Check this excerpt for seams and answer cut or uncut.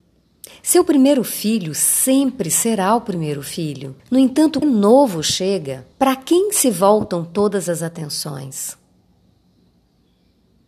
cut